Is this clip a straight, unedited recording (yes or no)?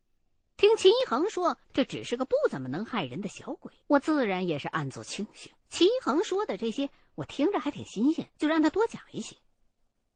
no